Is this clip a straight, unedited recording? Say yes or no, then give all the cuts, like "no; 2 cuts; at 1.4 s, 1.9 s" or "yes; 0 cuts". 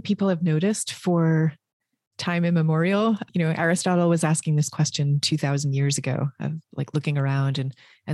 yes; 0 cuts